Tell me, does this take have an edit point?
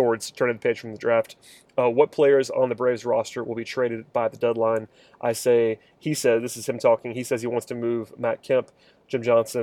no; 0 cuts

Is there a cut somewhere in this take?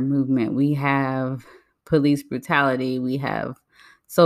no; 0 cuts

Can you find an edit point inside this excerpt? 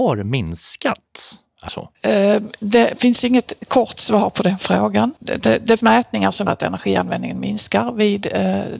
yes; 3 cuts; at 1.7 s, 5.8 s, 6.5 s

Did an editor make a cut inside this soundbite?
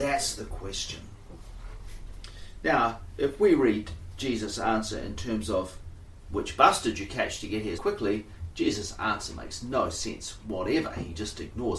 yes; 1 cut; at 7.8 s

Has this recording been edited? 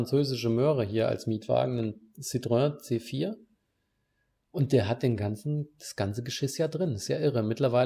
no; 0 cuts

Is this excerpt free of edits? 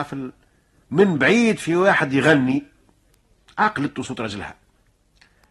yes; 0 cuts

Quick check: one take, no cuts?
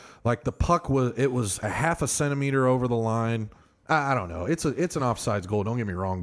yes; 0 cuts

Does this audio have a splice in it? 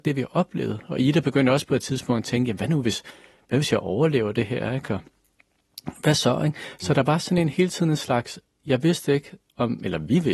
no; 0 cuts

